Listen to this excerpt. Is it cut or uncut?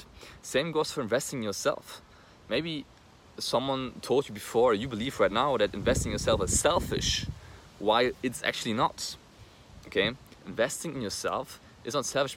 uncut